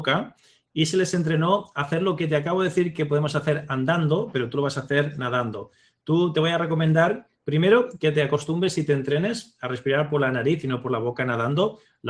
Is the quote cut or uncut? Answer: uncut